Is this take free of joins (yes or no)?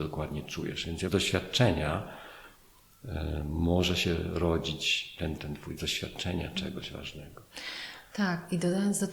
no